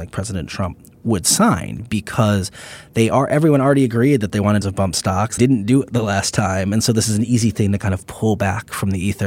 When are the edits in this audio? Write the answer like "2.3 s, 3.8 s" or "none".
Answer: 4.6 s, 5.4 s